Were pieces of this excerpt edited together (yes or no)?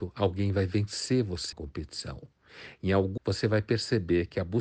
yes